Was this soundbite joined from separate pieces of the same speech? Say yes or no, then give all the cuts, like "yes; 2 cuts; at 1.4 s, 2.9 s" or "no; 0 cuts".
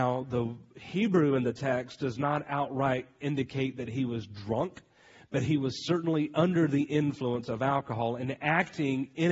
no; 0 cuts